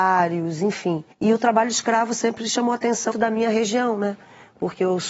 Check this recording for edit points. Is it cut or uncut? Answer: cut